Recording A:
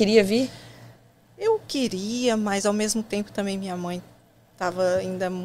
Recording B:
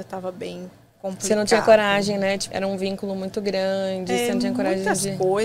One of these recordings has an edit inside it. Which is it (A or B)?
B